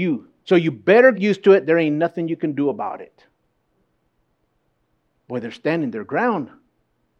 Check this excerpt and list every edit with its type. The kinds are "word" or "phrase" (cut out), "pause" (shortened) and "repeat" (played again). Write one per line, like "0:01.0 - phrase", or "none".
0:01.1 - word